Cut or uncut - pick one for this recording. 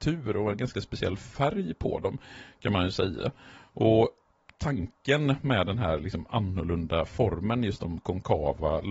uncut